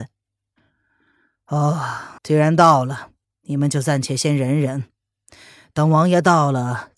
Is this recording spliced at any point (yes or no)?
yes